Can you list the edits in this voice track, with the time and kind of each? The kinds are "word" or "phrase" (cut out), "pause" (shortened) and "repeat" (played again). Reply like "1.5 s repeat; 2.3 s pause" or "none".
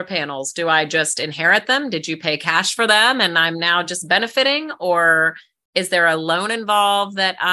none